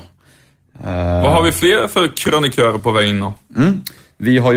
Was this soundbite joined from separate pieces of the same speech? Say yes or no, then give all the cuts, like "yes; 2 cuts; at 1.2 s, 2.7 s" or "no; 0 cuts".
no; 0 cuts